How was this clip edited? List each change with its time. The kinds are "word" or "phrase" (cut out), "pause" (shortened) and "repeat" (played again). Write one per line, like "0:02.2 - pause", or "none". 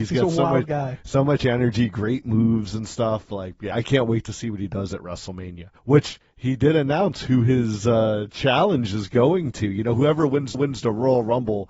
0:03.7 - word
0:05.8 - pause
0:10.5 - repeat